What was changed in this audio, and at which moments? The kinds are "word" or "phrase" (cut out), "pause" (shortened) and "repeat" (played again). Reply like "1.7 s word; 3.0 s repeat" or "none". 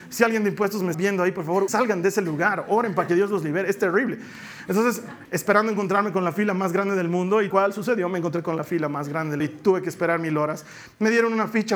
0.9 s word; 1.7 s word; 5.2 s word; 7.5 s word; 9.4 s word